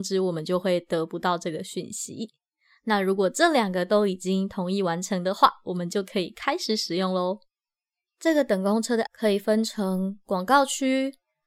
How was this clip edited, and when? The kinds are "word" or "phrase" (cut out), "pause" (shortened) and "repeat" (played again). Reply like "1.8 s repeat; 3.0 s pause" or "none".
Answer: 9.1 s word